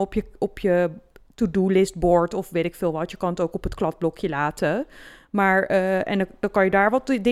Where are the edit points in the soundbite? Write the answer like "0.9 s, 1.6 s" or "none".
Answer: none